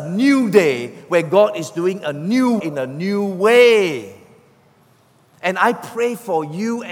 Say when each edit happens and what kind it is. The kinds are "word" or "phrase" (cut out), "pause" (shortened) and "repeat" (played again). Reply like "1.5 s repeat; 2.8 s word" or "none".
2.6 s word